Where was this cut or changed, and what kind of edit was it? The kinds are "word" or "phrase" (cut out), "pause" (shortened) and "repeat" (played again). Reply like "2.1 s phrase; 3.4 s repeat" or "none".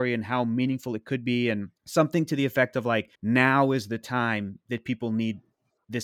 1.8 s pause; 3.1 s pause